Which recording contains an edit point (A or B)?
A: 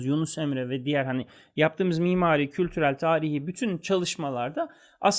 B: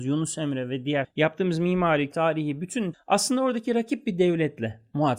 B